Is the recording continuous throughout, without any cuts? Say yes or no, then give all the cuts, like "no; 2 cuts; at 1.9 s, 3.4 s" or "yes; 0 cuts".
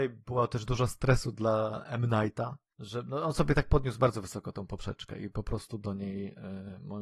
yes; 0 cuts